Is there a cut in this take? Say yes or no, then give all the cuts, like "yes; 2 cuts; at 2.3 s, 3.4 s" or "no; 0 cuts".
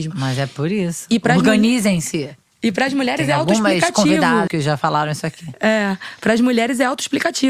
yes; 1 cut; at 4.5 s